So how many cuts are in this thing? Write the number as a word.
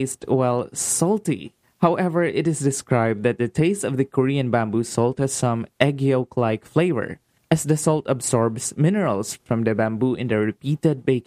one